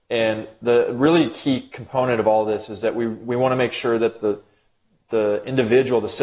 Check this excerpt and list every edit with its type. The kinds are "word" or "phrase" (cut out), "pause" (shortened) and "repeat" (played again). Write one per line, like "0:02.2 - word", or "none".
none